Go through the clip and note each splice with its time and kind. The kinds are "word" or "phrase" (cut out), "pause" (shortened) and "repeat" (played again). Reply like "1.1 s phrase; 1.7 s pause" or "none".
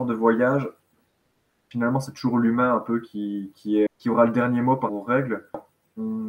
3.5 s word; 3.9 s word; 4.9 s word